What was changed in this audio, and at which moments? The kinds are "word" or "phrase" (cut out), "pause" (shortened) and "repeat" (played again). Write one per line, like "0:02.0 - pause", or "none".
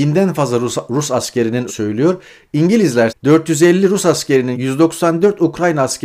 0:01.7 - word
0:03.1 - word
0:04.5 - word